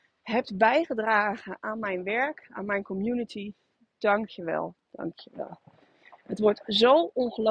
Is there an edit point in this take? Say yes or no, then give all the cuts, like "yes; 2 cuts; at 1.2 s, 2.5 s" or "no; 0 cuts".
no; 0 cuts